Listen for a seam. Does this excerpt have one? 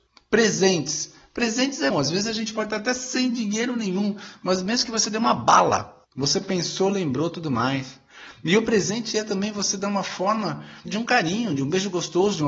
yes; 3 cuts; at 1.9 s, 6.0 s, 10.9 s

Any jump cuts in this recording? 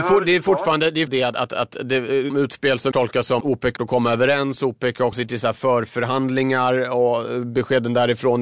yes; 6 cuts; at 1.1 s, 2.3 s, 2.9 s, 3.4 s, 3.8 s, 5.1 s

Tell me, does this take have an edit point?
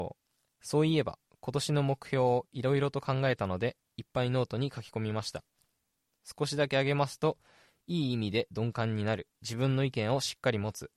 yes; 1 cut; at 9.4 s

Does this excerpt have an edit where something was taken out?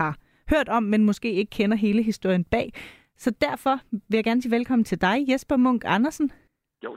no; 0 cuts

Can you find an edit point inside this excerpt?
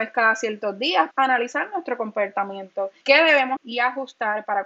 yes; 3 cuts; at 1.1 s, 3.0 s, 3.6 s

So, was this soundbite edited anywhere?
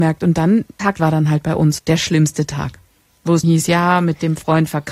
yes; 3 cuts; at 1.0 s, 1.8 s, 3.4 s

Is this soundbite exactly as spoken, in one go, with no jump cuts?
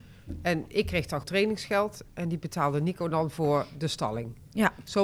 no; 1 cut; at 1.2 s

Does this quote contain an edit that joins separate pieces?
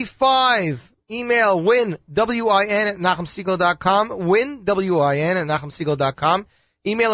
yes; 1 cut; at 1.0 s

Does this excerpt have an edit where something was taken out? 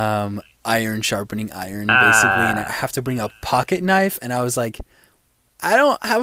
no; 0 cuts

